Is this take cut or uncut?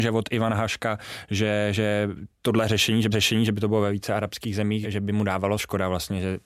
cut